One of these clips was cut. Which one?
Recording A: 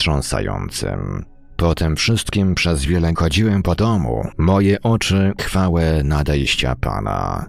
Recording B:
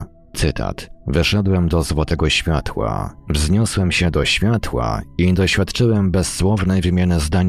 A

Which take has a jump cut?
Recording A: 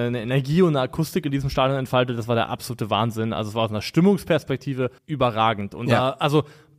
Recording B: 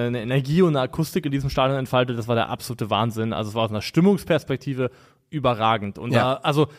A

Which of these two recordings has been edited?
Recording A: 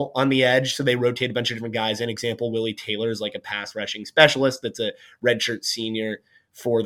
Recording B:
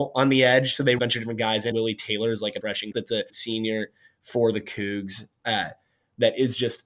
B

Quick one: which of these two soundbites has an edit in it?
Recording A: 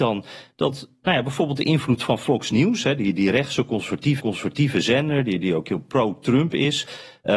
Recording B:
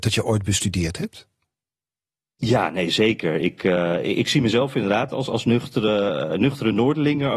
A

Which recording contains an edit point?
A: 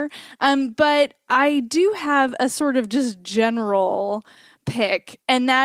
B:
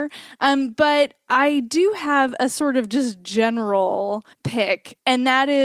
B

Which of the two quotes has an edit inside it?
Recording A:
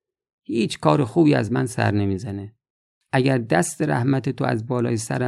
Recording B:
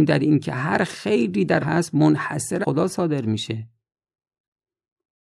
B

